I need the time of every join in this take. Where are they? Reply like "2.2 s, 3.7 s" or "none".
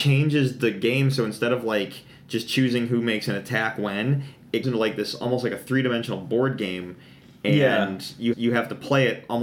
4.6 s, 8.3 s